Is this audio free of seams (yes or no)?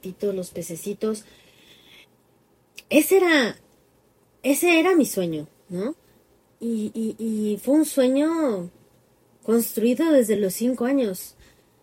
yes